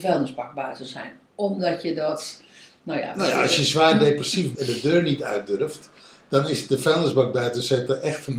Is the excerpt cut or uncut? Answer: cut